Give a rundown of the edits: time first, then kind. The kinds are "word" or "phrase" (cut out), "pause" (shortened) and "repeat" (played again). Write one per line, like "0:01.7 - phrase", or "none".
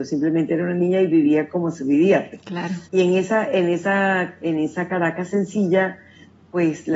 0:02.9 - pause